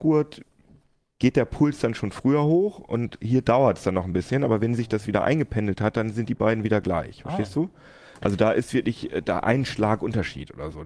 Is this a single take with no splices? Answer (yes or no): yes